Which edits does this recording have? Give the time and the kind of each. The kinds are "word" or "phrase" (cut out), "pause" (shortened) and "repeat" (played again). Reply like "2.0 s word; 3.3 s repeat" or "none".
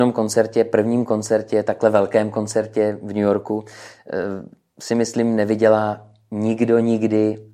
none